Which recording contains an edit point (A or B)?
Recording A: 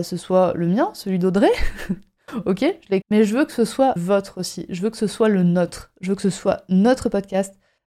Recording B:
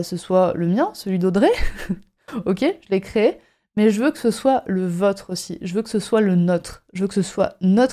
A